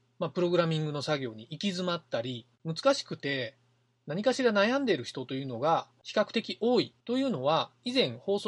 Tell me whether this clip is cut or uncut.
cut